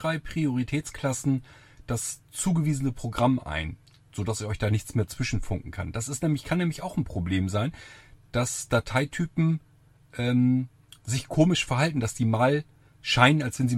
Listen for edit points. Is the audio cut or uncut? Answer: uncut